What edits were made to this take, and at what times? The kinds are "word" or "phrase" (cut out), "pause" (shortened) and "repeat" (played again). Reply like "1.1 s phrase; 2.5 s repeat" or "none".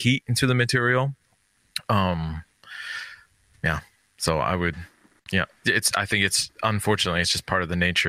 none